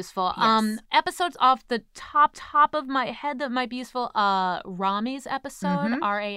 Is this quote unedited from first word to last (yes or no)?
no